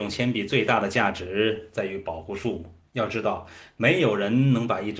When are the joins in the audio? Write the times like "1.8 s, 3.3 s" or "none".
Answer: 2.9 s